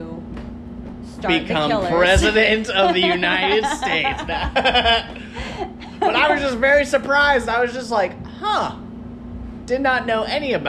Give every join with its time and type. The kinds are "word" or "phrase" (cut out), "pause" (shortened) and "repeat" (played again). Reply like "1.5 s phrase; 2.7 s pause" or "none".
none